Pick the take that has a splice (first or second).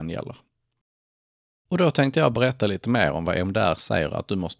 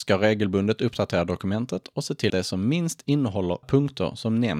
second